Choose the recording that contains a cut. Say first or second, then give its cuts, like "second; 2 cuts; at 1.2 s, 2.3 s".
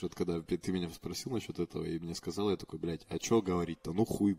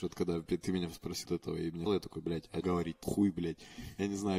second; 4 cuts; at 1.2 s, 1.9 s, 2.6 s, 3.0 s